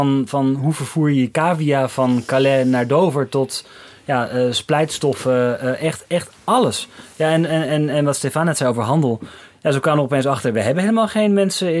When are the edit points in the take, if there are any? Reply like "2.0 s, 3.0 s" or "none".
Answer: none

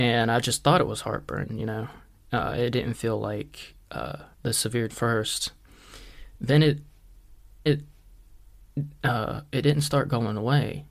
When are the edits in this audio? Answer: 4.3 s, 4.9 s, 7.7 s

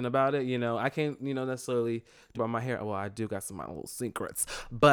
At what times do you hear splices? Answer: 2.3 s

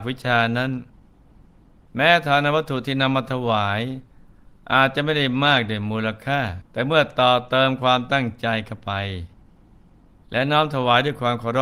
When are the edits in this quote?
6.7 s

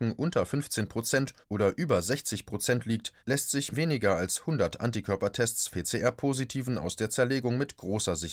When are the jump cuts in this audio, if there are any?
1.4 s, 3.2 s, 3.7 s, 5.7 s

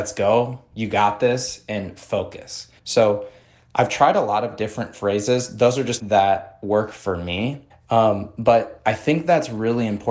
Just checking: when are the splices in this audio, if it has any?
2.8 s, 6.0 s, 7.7 s

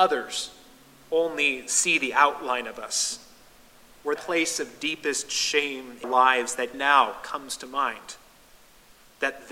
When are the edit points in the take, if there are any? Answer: 4.2 s, 6.0 s, 6.7 s

